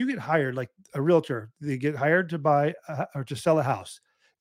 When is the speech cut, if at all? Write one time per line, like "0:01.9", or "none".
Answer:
none